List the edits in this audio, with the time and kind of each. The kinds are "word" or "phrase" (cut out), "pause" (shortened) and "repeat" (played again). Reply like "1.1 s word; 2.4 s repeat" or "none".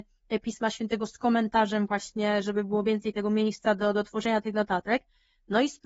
none

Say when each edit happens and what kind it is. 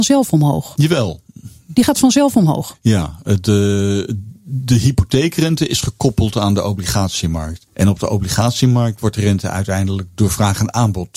7.7 s pause

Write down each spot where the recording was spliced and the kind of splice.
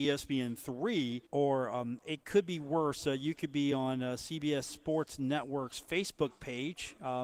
1.3 s pause

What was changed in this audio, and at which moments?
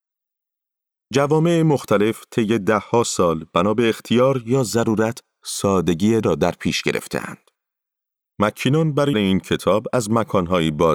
6.2 s word; 9.1 s word

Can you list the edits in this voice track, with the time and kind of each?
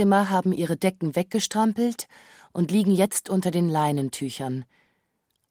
none

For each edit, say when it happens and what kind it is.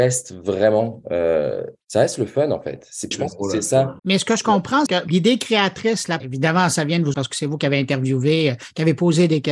1.8 s pause; 3.1 s phrase; 4.0 s pause; 4.9 s word; 6.2 s word; 7.1 s word

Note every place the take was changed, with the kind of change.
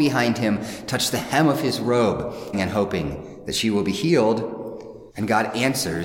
2.5 s word; 5.1 s pause

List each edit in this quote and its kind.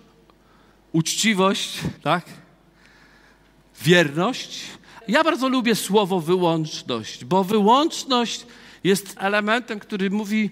2.0 s pause; 5.0 s word; 9.2 s word

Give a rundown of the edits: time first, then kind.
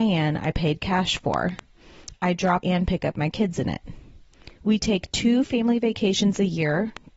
2.6 s word; 4.6 s pause

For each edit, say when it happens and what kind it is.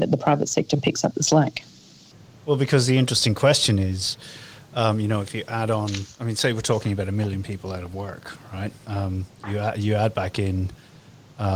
none

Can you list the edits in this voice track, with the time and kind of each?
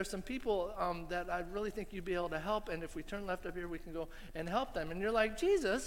none

